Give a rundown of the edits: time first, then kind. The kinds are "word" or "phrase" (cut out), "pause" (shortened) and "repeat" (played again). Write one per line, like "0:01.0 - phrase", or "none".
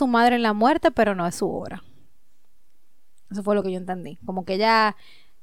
none